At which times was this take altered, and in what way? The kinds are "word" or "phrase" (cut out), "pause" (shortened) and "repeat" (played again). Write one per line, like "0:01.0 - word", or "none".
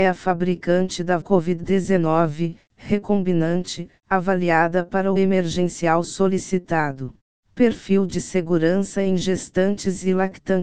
0:01.2 - word
0:05.2 - word
0:07.2 - pause